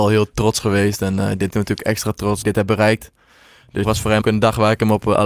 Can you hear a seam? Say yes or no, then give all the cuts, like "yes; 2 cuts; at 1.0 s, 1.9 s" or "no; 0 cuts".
yes; 4 cuts; at 1.5 s, 2.4 s, 3.8 s, 4.2 s